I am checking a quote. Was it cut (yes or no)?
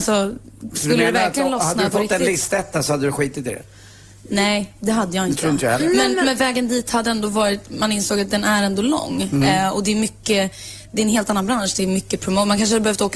no